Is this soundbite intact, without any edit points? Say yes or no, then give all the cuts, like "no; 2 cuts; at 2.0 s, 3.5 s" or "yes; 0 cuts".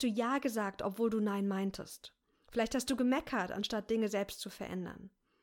yes; 0 cuts